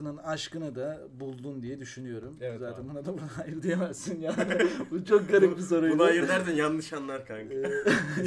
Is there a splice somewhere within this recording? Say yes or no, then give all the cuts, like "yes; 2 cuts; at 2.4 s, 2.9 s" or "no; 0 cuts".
no; 0 cuts